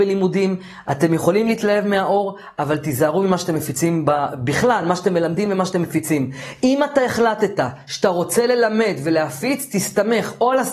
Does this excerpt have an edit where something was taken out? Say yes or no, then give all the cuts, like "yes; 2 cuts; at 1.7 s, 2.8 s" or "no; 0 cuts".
no; 0 cuts